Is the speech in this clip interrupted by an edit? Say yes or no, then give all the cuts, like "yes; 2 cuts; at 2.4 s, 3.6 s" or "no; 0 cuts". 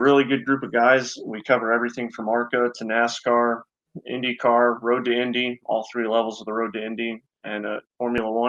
no; 0 cuts